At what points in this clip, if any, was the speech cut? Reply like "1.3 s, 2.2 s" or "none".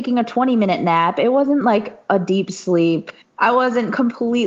none